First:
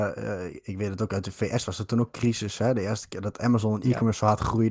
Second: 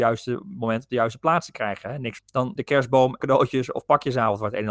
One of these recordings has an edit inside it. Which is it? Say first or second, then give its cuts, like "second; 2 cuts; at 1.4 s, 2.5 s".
second; 3 cuts; at 2.2 s, 2.6 s, 3.2 s